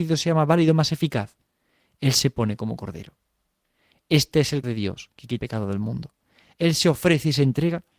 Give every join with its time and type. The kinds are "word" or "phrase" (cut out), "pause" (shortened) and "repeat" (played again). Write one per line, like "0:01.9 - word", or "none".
0:04.6 - word
0:05.4 - word